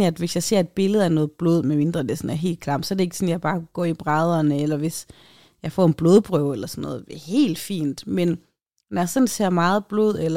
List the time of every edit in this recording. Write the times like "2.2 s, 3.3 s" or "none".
none